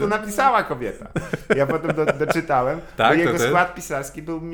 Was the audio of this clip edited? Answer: no; 0 cuts

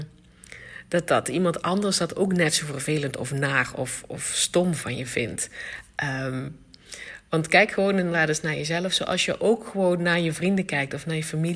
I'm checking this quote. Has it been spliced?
no; 0 cuts

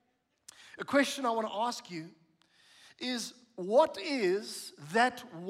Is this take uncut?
yes; 0 cuts

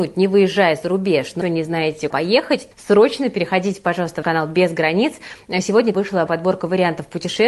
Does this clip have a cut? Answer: yes; 6 cuts; at 1.4 s, 2.1 s, 2.7 s, 4.2 s, 5.9 s, 6.3 s

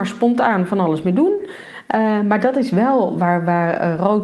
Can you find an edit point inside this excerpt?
no; 0 cuts

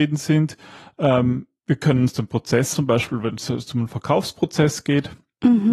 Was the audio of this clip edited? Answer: yes; 1 cut; at 2.7 s

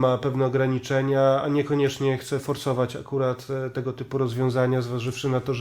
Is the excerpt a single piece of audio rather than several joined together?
yes; 0 cuts

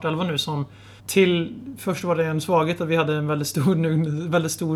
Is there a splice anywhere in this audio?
yes; 1 cut; at 1.0 s

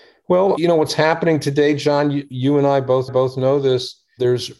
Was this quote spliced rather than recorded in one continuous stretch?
yes; 1 cut; at 3.1 s

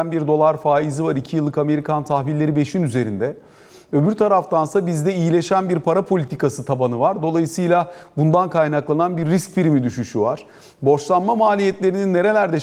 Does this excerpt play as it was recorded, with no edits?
yes; 0 cuts

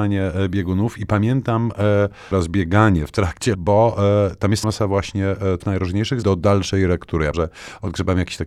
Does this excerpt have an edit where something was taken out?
yes; 6 cuts; at 2.3 s, 3.5 s, 4.6 s, 5.6 s, 6.2 s, 7.3 s

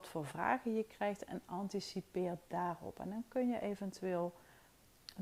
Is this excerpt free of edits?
yes; 0 cuts

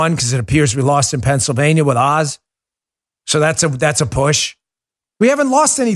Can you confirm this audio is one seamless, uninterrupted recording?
yes; 0 cuts

